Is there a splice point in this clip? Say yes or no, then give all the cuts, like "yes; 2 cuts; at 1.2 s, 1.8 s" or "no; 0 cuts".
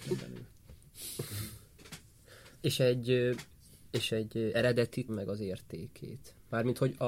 yes; 3 cuts; at 2.5 s, 4.1 s, 5.1 s